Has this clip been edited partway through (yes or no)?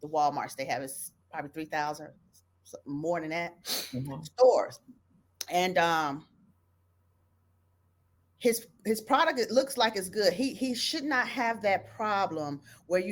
no